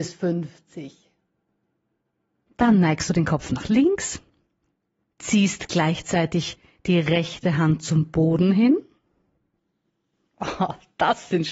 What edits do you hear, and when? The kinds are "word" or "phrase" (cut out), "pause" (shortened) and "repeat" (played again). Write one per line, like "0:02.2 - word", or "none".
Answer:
none

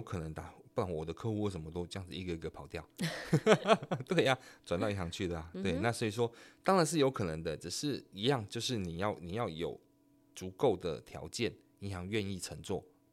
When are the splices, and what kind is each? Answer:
none

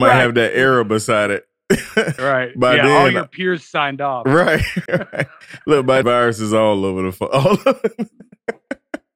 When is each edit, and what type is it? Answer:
0:02.2 - word
0:04.9 - word
0:06.0 - word

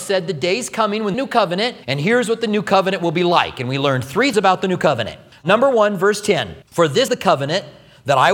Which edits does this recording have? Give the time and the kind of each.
0:01.1 - phrase
0:01.8 - pause
0:04.3 - word
0:05.3 - pause
0:06.6 - pause
0:07.1 - word

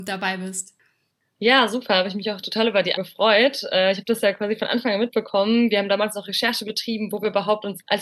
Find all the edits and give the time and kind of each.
0:03.0 - word

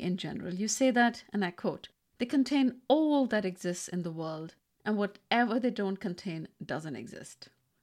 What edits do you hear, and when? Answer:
none

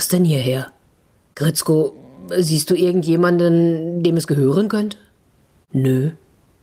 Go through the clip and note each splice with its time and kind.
none

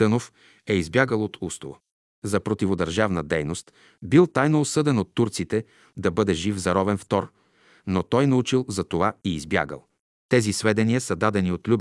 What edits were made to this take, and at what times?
none

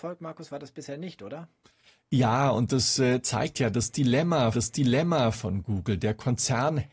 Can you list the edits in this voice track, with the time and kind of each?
0:04.5 - repeat

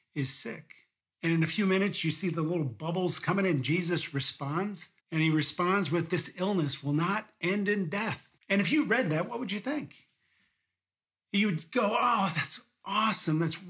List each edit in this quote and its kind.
0:01.0 - pause
0:05.0 - pause
0:08.4 - pause

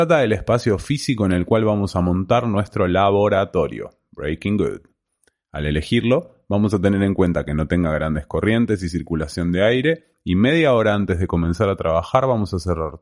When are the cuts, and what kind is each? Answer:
none

